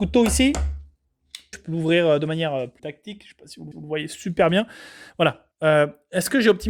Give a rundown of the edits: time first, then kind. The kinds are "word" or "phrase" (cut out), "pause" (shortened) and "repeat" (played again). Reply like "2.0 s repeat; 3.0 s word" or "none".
1.5 s word; 2.8 s word; 3.7 s repeat; 5.5 s pause